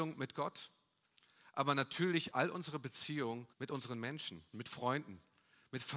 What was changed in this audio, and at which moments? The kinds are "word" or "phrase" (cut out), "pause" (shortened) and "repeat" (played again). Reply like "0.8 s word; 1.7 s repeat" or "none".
2.3 s word; 3.5 s pause; 4.5 s word